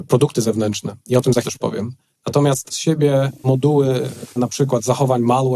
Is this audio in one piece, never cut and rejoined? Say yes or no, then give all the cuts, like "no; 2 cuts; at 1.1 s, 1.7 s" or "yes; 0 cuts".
no; 4 cuts; at 1.4 s, 2.7 s, 3.4 s, 4.4 s